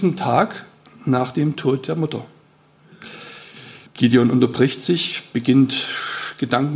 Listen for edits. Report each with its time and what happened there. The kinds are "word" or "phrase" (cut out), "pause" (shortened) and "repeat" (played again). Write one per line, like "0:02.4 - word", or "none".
0:03.9 - pause

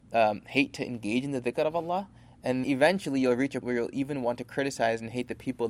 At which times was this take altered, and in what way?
0:02.6 - word
0:03.6 - word

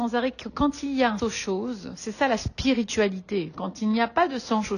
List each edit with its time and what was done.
0:01.2 - word

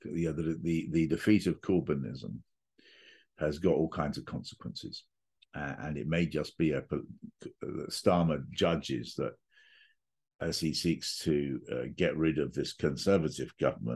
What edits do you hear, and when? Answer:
none

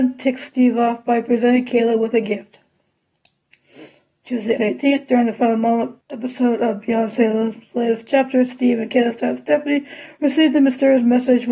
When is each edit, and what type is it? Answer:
0:04.6 - word
0:06.0 - pause

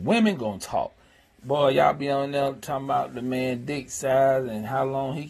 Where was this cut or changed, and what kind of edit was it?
none

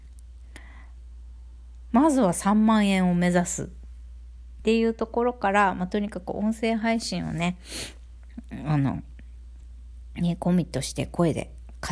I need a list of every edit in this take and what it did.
none

